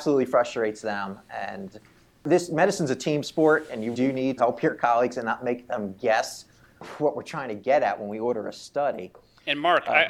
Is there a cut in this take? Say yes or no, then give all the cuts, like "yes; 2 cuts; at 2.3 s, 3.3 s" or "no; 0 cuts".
yes; 2 cuts; at 3.9 s, 4.4 s